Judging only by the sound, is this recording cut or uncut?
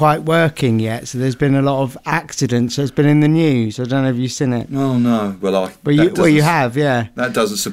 uncut